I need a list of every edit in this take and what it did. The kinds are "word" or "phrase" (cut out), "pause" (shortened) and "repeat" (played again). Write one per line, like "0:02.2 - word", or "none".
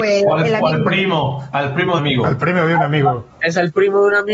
0:02.0 - phrase
0:03.3 - pause